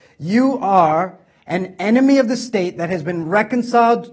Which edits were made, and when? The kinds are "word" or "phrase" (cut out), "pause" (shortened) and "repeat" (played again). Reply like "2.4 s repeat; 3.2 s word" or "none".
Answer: none